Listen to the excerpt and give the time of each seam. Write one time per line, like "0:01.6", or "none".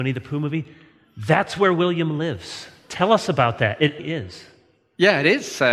0:04.0

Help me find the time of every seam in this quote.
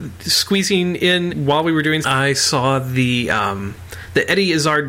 0:01.3
0:02.0

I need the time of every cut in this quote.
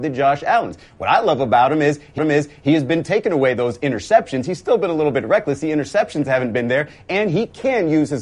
0:02.2

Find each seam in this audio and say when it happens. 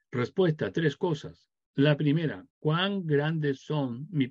0:02.5

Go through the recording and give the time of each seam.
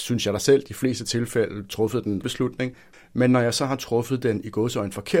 0:02.2

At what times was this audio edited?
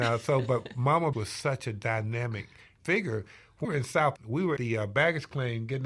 0:01.1
0:02.8
0:03.6
0:04.2
0:04.6

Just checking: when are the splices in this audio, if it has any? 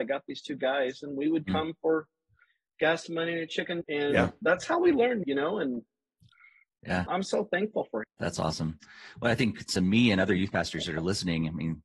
0:03.8
0:05.2
0:07.1
0:08.0
0:09.7

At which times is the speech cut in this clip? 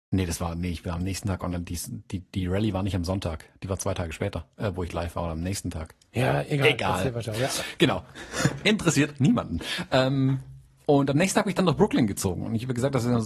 none

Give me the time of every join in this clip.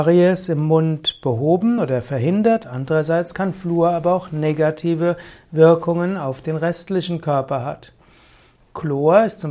none

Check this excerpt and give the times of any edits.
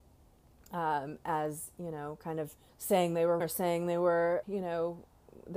0:02.7
0:03.4
0:04.4

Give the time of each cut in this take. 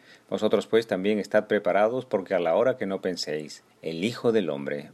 0:03.7

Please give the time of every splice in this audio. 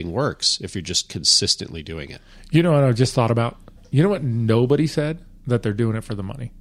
0:05.4

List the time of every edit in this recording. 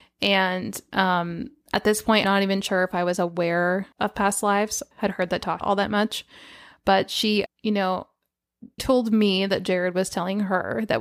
0:01.6
0:02.2
0:03.9
0:04.9
0:05.6
0:07.5
0:08.8

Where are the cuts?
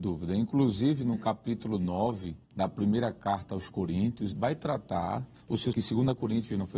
0:02.4
0:04.3
0:05.7

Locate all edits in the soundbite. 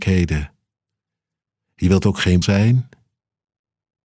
0:02.4

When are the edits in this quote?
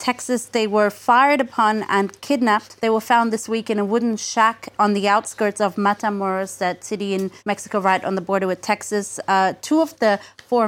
0:02.8
0:07.4

